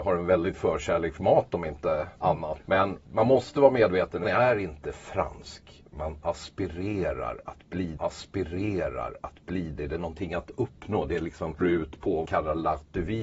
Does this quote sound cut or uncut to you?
cut